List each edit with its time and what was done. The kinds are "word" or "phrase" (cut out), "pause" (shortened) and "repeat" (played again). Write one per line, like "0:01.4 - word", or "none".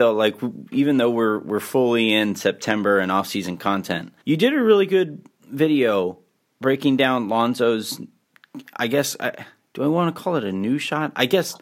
0:04.2 - pause